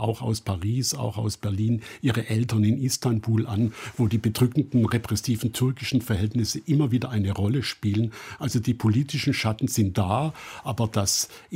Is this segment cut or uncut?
uncut